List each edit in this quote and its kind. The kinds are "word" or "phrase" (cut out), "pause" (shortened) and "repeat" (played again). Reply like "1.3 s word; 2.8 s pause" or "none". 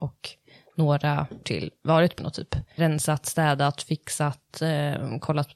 1.4 s word; 2.2 s word; 2.8 s word